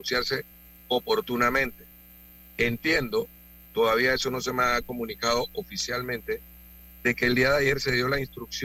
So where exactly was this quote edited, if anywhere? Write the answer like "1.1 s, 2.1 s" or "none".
none